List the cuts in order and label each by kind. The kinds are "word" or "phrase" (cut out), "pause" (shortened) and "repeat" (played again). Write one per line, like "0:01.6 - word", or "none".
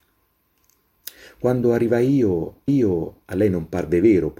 0:02.7 - repeat